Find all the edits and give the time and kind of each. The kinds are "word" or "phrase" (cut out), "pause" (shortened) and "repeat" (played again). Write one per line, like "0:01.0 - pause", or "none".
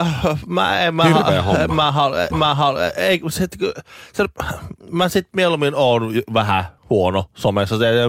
0:02.3 - repeat
0:04.8 - pause
0:06.8 - pause